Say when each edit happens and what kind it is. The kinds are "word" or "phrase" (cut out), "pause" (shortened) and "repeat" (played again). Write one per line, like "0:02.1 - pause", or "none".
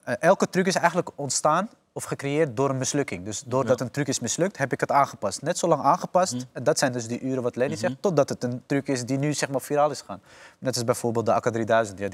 none